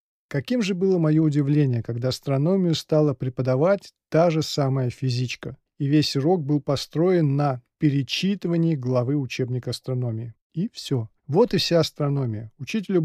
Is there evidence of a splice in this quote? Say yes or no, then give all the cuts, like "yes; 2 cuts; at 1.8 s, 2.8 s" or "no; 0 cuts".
yes; 3 cuts; at 5.7 s, 10.4 s, 11.2 s